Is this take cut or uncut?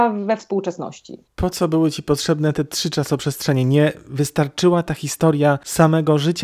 uncut